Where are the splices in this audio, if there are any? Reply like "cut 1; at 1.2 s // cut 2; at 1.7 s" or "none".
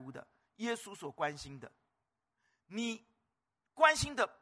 none